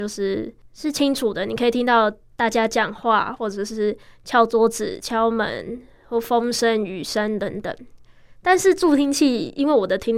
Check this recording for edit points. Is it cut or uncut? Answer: uncut